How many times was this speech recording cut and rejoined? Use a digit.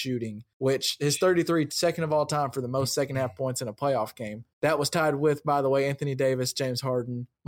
1